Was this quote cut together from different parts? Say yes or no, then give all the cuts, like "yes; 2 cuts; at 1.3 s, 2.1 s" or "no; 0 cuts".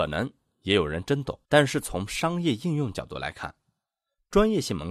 yes; 1 cut; at 1.4 s